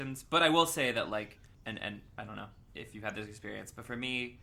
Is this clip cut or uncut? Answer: cut